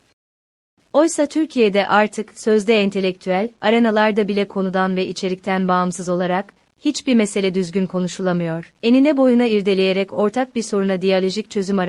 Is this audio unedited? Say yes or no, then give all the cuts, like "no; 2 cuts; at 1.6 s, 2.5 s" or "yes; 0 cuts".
no; 1 cut; at 8.8 s